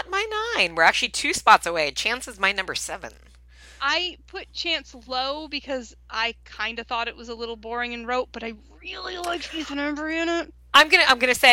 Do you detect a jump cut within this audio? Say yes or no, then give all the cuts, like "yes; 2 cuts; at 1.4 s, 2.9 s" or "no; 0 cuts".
no; 0 cuts